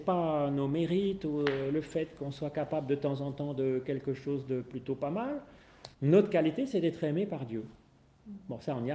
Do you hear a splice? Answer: yes; 1 cut; at 5.9 s

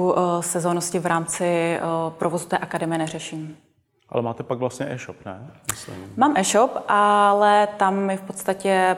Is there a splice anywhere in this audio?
no; 0 cuts

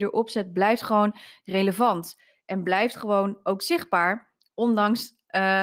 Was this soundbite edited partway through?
no; 0 cuts

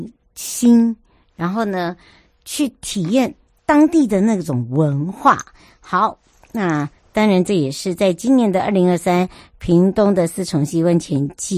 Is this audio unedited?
yes; 0 cuts

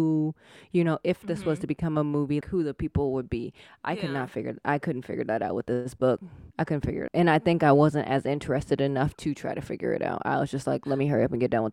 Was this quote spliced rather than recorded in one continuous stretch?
yes; 3 cuts; at 2.4 s, 6.5 s, 7.1 s

